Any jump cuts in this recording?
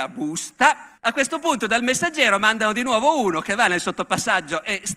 yes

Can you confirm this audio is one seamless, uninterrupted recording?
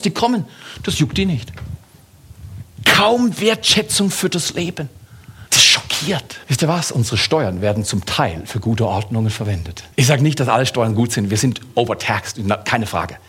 no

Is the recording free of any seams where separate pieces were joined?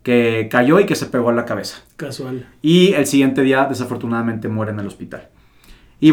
yes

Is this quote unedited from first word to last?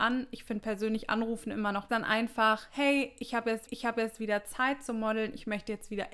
no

